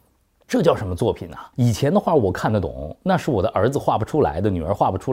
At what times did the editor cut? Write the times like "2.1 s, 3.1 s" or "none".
1.5 s